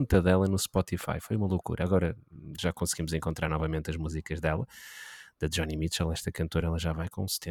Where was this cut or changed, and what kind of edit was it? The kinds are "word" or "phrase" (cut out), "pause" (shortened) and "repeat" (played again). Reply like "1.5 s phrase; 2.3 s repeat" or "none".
none